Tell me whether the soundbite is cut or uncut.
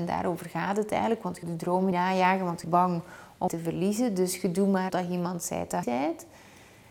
cut